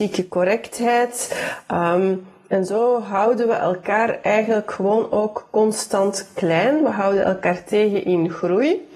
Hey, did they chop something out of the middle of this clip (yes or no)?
no